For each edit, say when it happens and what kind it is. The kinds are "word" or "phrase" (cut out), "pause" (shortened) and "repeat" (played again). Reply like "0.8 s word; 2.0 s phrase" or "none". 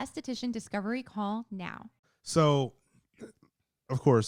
2.0 s pause

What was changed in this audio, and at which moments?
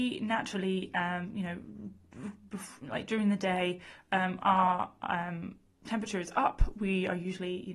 none

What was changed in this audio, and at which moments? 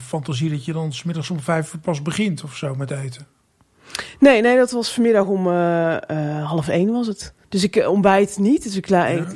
7.4 s pause

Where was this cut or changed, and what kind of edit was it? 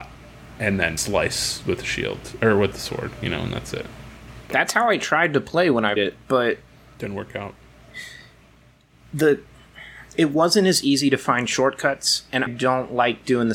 1.0 s word; 6.0 s word; 12.5 s word

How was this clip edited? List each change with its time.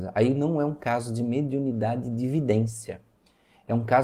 none

